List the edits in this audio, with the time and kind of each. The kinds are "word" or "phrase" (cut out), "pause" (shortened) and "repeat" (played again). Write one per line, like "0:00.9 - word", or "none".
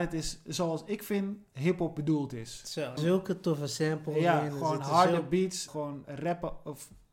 0:03.0 - phrase
0:05.7 - word
0:06.0 - word